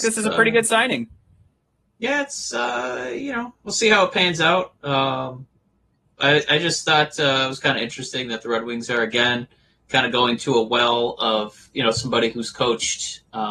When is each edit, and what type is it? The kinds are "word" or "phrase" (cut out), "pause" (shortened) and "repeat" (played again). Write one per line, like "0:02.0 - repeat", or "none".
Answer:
none